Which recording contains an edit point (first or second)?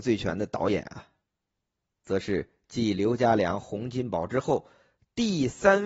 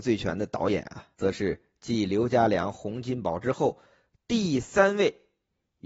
second